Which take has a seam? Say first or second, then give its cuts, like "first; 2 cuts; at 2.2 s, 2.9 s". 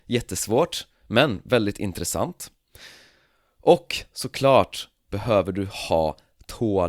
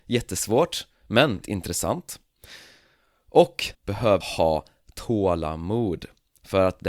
second; 3 cuts; at 1.4 s, 3.7 s, 4.2 s